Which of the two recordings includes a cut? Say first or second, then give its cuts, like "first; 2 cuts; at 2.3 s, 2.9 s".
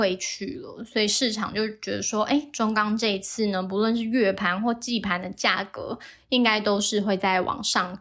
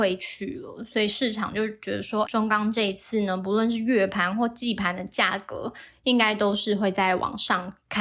second; 1 cut; at 2.3 s